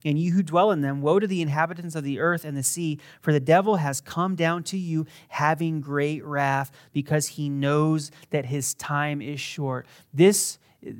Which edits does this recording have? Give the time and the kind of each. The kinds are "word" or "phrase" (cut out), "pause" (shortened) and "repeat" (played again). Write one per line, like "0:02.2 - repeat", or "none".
none